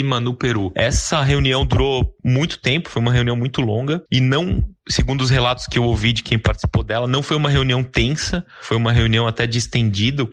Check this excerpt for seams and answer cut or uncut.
cut